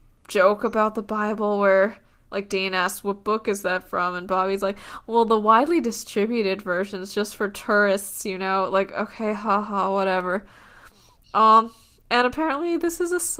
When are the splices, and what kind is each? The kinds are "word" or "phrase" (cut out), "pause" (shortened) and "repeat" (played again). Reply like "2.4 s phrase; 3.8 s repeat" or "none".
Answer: none

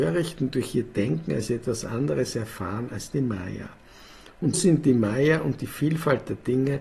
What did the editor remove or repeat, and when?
4.5 s word

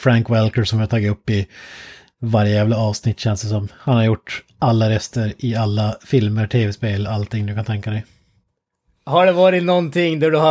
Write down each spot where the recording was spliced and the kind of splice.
none

